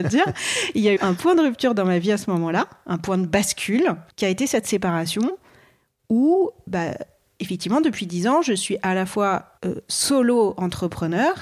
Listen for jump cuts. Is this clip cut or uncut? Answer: cut